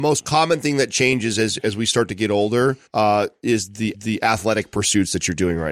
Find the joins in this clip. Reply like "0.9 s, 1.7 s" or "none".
2.9 s, 3.9 s